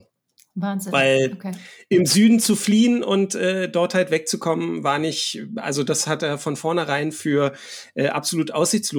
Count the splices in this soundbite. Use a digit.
0